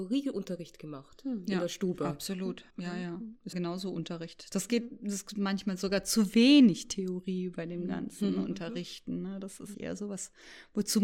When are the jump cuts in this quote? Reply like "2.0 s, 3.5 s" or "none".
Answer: 2.7 s, 3.5 s, 9.7 s

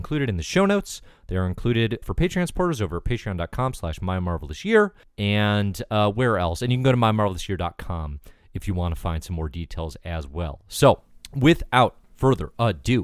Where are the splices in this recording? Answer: 2.0 s

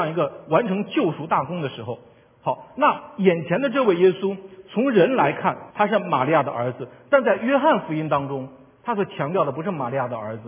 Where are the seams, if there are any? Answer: 5.7 s

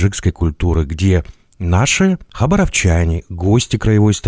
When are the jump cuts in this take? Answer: none

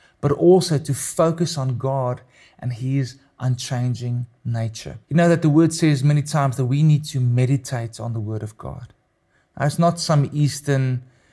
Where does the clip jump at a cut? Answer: 5.0 s

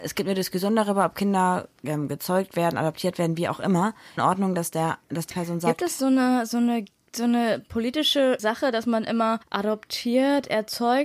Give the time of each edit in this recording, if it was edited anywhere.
4.2 s, 5.3 s, 7.0 s

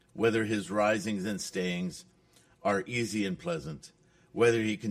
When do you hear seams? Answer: none

